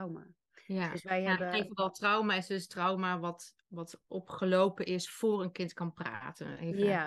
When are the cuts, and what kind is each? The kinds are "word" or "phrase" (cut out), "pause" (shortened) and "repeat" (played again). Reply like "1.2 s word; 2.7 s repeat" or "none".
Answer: none